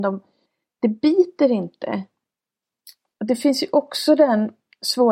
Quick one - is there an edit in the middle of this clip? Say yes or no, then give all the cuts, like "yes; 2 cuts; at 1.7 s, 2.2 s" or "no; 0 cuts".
no; 0 cuts